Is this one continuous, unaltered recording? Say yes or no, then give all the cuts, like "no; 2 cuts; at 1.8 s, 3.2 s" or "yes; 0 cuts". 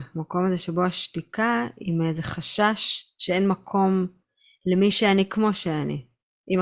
yes; 0 cuts